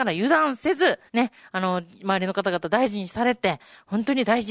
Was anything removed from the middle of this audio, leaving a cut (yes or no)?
yes